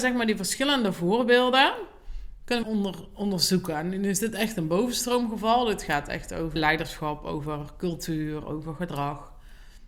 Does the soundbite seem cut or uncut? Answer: cut